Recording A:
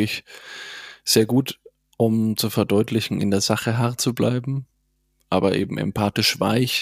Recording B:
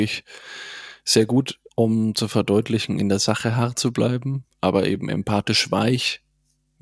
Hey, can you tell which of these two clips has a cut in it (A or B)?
B